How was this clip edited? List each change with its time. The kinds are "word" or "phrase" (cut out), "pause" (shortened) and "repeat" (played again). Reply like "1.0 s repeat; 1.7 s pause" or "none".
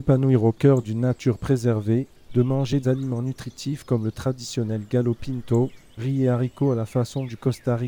2.8 s word